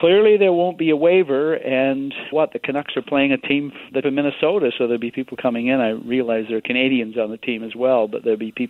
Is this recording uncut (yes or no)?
no